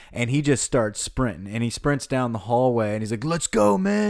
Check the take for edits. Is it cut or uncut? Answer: uncut